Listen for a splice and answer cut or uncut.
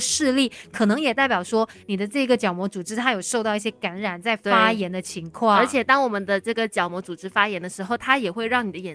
uncut